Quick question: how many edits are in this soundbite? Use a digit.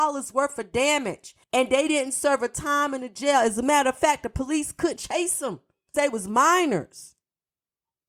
3